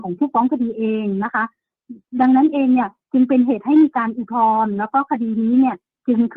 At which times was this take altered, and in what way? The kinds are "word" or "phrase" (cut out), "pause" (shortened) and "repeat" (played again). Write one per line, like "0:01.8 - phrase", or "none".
none